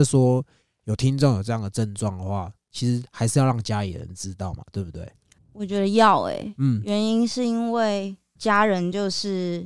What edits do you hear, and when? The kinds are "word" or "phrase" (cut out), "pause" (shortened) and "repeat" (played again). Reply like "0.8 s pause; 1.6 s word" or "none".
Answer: none